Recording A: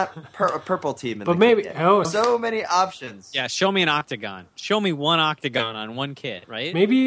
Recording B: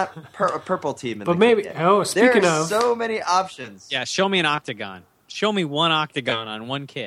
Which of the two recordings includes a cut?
A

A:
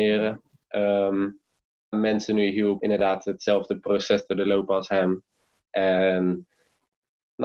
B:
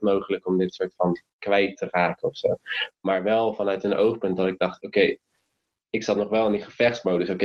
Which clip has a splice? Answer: A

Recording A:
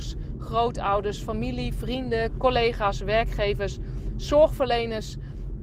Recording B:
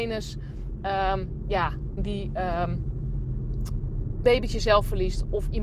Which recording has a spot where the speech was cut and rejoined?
B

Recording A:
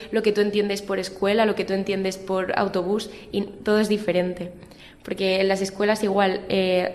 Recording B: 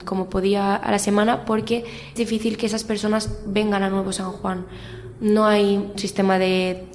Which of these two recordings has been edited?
B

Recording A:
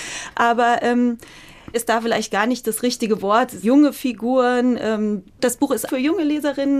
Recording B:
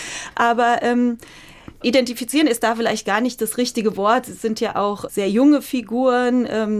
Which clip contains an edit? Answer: A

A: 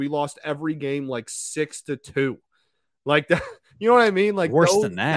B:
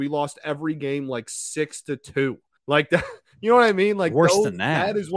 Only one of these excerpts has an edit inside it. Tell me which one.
B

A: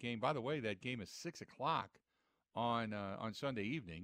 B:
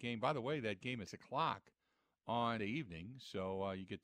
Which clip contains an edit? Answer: B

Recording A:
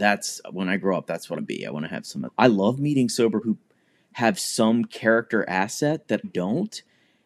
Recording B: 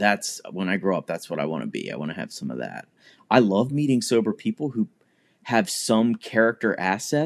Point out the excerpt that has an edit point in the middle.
A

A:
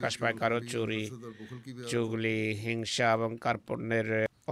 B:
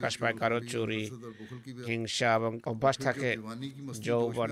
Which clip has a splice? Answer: B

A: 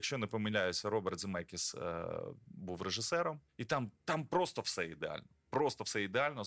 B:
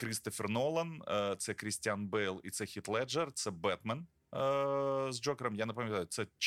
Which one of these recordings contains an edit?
A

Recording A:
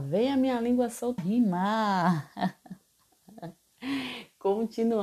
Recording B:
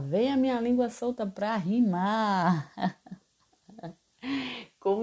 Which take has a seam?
A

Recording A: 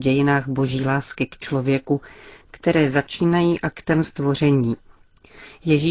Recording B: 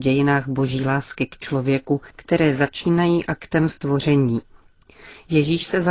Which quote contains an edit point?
B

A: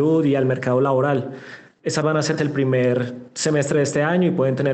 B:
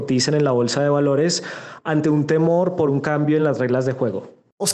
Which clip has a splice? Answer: A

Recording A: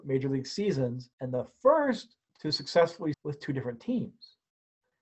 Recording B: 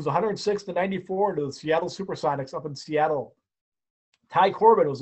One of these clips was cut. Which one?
A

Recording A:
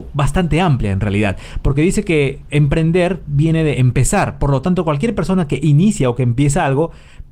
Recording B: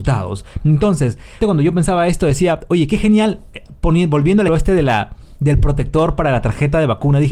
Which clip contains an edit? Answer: B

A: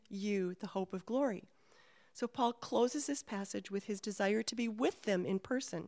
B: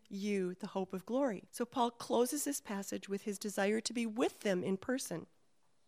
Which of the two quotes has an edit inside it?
B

